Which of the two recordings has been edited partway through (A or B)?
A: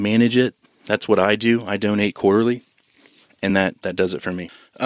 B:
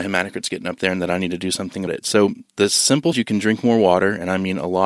B